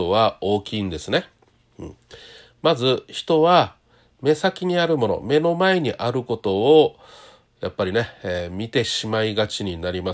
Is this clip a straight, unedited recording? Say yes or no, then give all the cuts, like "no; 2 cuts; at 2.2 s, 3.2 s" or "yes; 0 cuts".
yes; 0 cuts